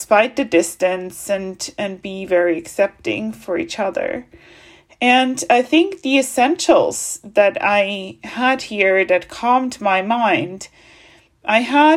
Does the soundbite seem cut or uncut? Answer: uncut